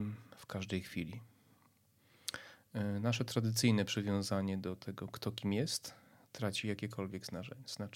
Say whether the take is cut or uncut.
uncut